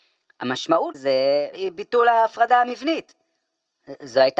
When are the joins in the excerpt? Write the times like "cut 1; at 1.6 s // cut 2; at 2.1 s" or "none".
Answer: cut 1; at 0.9 s // cut 2; at 1.5 s